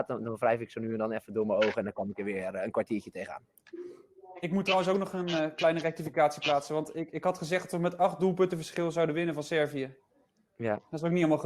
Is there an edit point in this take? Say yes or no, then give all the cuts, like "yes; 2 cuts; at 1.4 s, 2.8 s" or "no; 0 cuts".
no; 0 cuts